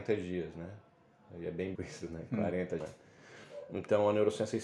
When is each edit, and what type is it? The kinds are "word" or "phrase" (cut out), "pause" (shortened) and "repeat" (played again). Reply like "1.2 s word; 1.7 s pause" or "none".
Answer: 1.8 s word; 2.8 s word